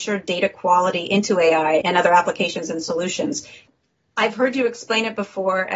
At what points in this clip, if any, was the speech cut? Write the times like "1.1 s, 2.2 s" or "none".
1.8 s

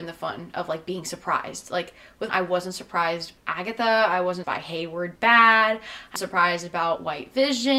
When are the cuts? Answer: 2.3 s, 3.4 s, 4.4 s, 5.2 s, 6.2 s

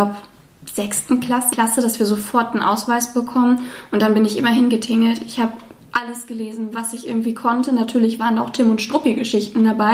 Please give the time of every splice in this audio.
1.5 s

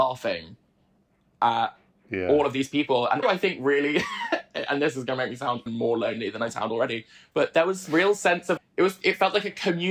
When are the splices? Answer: 3.2 s, 5.7 s, 8.6 s

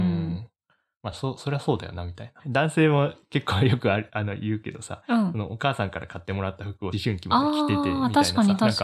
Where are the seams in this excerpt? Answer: none

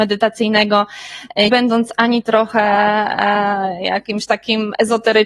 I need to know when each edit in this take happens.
1.5 s

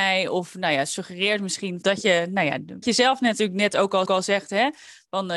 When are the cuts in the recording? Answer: 1.8 s, 2.8 s, 4.1 s

